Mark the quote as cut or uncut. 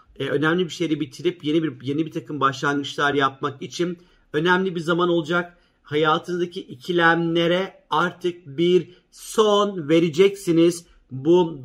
uncut